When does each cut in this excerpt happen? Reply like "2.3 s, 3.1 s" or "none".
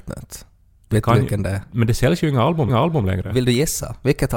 2.7 s